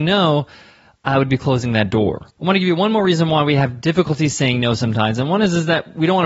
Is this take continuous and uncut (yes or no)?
no